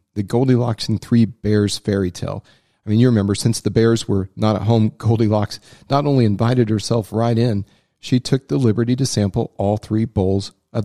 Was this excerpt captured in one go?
yes; 0 cuts

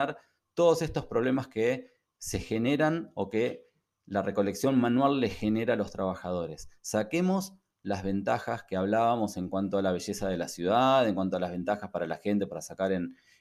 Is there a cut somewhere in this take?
no; 0 cuts

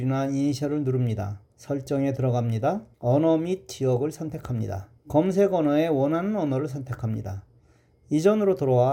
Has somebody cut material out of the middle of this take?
yes; 3 cuts; at 1.5 s, 2.9 s, 5.0 s

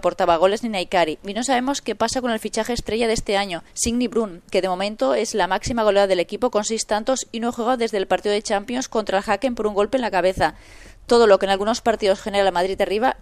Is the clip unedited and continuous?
no; 1 cut; at 3.7 s

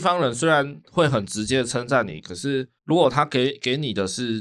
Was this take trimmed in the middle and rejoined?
yes; 1 cut; at 2.8 s

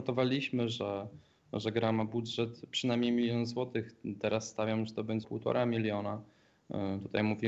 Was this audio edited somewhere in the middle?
yes; 1 cut; at 5.2 s

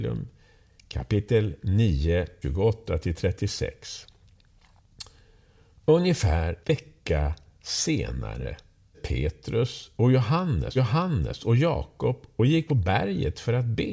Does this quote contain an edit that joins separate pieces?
yes; 5 cuts; at 2.4 s, 6.6 s, 8.9 s, 10.8 s, 12.7 s

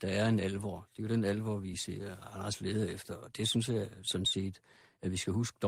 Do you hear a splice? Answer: no; 0 cuts

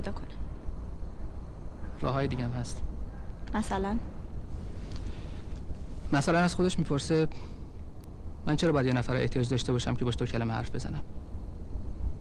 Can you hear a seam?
no; 0 cuts

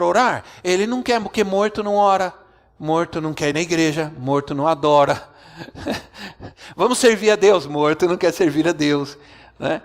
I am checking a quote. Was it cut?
no; 0 cuts

